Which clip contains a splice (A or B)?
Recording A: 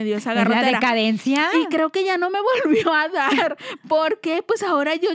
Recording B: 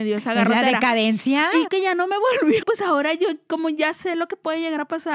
B